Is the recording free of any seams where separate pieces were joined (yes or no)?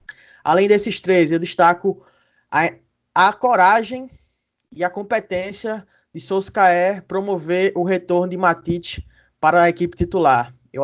yes